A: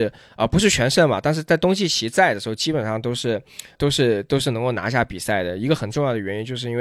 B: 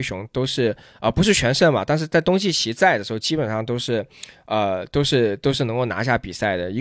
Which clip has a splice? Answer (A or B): A